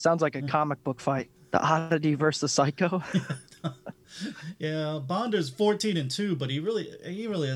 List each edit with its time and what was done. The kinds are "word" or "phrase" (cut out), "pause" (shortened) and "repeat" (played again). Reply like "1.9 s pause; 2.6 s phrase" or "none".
1.4 s pause